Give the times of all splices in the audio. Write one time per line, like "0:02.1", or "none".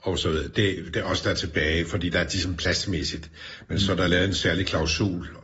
none